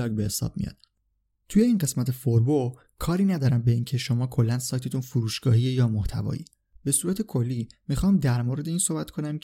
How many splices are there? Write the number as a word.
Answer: zero